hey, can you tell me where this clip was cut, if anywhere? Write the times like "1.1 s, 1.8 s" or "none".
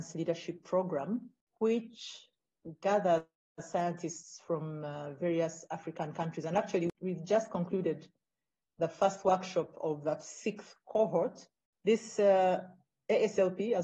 none